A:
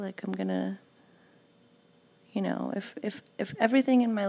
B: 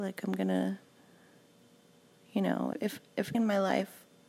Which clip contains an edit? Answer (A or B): B